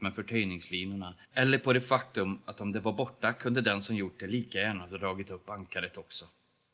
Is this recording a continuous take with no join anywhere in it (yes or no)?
no